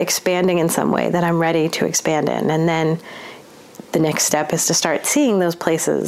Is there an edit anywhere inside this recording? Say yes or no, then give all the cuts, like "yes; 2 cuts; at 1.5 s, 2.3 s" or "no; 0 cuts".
no; 0 cuts